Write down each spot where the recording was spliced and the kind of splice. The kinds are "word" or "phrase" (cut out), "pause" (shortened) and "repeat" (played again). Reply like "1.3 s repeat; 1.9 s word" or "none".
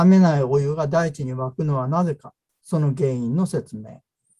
none